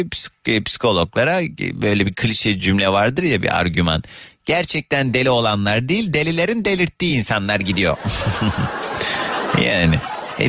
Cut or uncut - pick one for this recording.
uncut